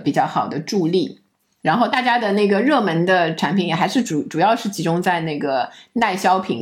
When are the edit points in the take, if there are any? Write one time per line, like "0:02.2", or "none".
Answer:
0:01.3